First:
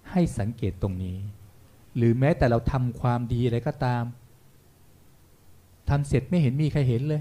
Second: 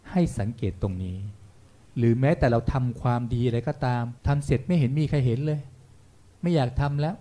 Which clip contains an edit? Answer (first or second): second